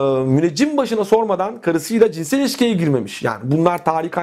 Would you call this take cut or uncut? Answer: uncut